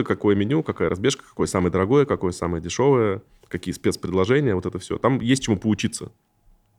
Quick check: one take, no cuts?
yes; 0 cuts

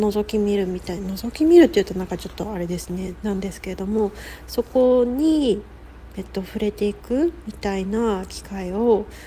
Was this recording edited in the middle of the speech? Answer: no; 0 cuts

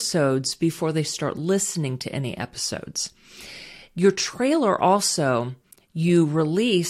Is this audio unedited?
yes; 0 cuts

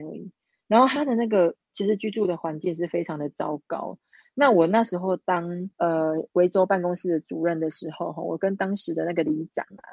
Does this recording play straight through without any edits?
no; 1 cut; at 5.7 s

